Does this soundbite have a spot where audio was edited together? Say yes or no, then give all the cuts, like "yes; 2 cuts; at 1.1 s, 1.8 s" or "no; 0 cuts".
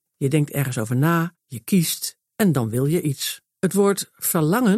yes; 3 cuts; at 1.4 s, 2.2 s, 3.5 s